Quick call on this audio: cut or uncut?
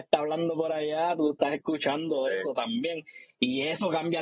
uncut